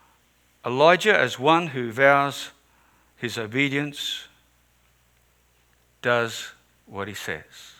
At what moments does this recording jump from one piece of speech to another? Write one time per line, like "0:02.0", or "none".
none